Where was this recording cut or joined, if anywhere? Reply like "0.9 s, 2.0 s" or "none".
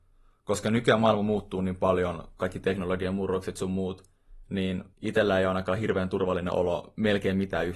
4.9 s